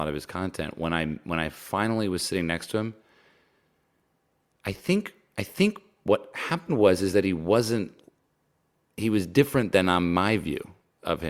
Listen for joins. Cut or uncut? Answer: uncut